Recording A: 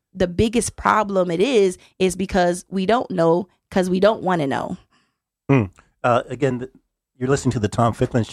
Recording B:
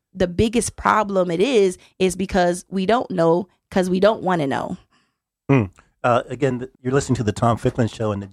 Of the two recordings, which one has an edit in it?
B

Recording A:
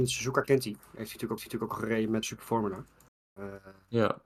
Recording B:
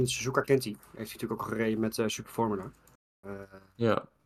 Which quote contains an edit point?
A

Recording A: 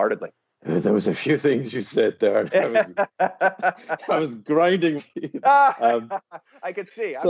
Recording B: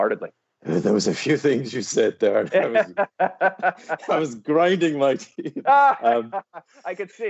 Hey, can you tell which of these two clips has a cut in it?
A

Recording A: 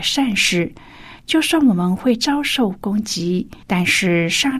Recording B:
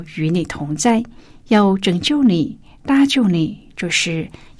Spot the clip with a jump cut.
A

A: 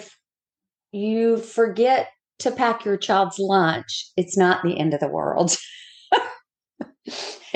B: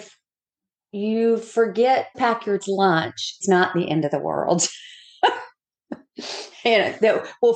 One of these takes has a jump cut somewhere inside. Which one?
B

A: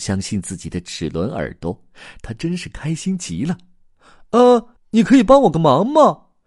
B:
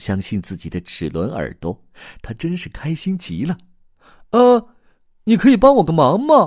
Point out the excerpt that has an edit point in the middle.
A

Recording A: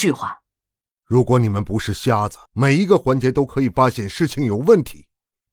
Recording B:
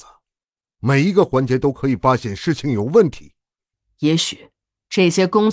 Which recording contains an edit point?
A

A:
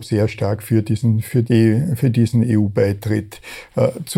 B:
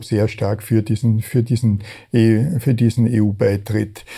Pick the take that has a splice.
A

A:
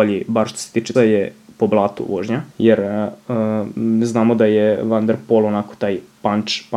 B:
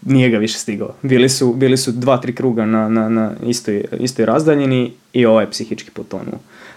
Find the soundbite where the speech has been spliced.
A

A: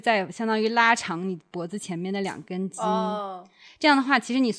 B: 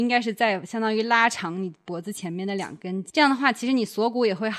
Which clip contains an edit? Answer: B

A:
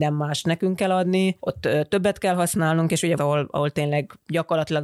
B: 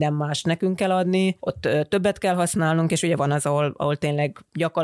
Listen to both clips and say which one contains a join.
A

